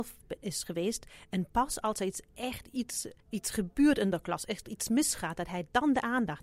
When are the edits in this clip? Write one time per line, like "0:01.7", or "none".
0:03.2